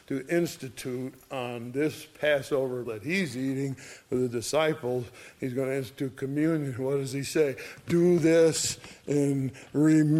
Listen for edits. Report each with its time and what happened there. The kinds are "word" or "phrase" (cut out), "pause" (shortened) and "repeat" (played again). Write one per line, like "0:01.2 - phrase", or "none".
0:02.8 - word